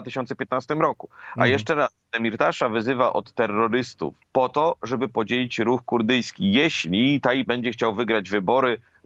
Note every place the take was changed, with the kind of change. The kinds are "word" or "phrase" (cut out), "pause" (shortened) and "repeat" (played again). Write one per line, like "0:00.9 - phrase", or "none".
0:04.2 - pause
0:07.5 - word